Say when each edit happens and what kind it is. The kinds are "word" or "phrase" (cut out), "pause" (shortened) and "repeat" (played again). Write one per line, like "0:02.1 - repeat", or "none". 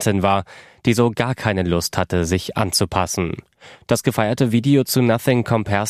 none